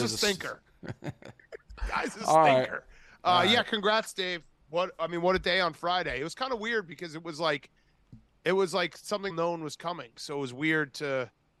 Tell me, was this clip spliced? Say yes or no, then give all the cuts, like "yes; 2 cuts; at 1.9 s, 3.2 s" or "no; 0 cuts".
yes; 1 cut; at 9.3 s